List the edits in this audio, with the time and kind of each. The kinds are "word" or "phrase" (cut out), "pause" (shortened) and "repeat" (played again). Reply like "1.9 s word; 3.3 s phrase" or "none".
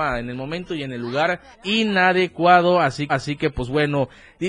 1.5 s pause; 3.1 s repeat